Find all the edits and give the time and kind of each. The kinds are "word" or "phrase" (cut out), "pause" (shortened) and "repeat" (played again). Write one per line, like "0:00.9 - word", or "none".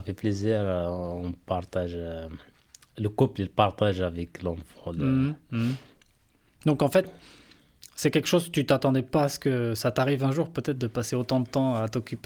none